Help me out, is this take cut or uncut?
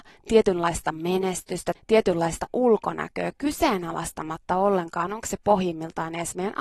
cut